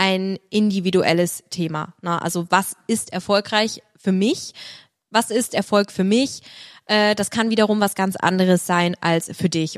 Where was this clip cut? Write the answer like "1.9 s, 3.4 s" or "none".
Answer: none